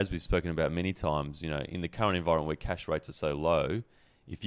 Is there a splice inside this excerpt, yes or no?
no